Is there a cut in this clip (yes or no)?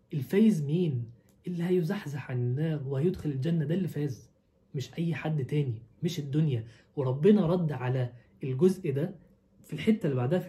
no